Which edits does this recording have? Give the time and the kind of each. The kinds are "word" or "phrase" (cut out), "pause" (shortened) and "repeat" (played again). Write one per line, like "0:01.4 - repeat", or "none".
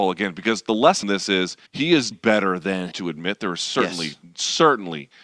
0:01.0 - phrase
0:01.7 - pause
0:02.1 - word
0:02.9 - phrase

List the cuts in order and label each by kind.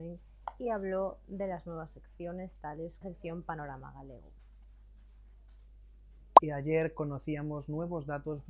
0:03.0 - phrase

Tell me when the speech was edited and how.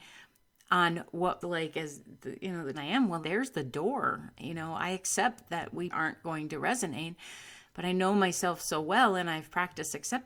0:01.4 - phrase
0:02.7 - phrase
0:03.2 - word
0:05.9 - word

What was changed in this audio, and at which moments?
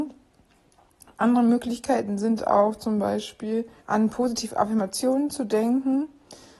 0:03.8 - pause

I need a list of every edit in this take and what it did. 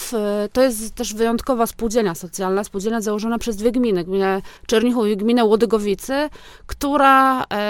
0:04.6 - pause

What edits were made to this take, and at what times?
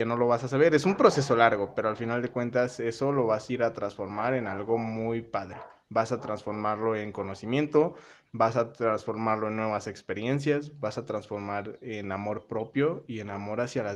0:05.8 - pause

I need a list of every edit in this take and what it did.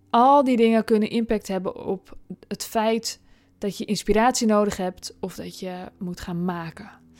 none

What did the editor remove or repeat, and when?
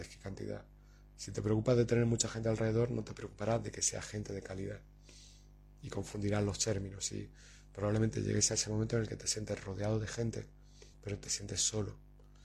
0:10.9 - pause

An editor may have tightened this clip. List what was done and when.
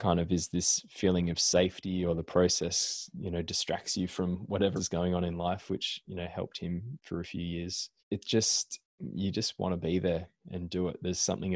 0:04.8 - word
0:08.0 - pause
0:08.9 - pause

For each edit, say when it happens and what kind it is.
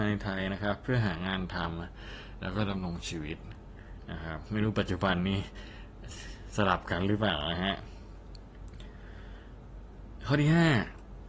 none

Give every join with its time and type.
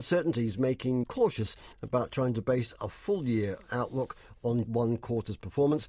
0:01.0 - word
0:01.7 - pause
0:04.7 - word

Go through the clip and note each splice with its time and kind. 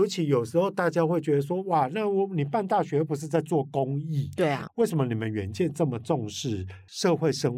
none

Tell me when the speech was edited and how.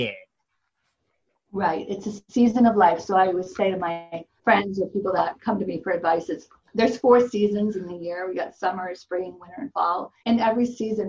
0:04.4 - pause
0:06.7 - pause
0:10.2 - pause

